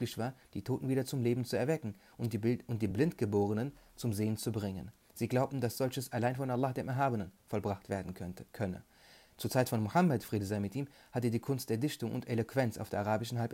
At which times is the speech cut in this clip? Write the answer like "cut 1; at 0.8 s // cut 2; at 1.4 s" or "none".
none